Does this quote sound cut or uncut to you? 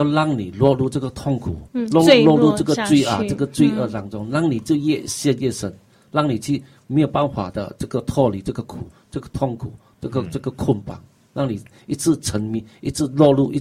uncut